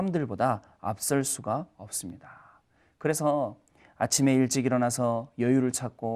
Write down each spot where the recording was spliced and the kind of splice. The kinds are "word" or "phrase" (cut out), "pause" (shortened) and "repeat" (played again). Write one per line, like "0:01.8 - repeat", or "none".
none